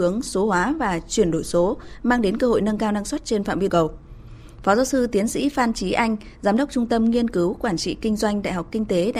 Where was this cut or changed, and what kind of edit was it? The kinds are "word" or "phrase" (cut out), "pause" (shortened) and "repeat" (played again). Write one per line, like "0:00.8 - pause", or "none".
0:03.7 - word